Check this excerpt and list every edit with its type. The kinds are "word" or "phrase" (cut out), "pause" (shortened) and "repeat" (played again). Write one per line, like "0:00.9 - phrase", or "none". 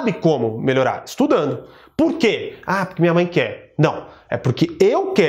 none